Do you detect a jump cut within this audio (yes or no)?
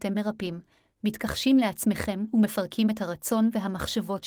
no